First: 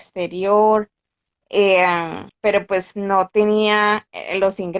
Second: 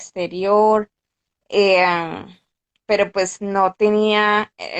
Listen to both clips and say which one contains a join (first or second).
first